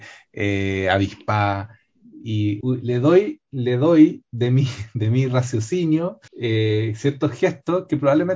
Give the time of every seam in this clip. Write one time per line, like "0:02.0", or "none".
0:02.6
0:06.3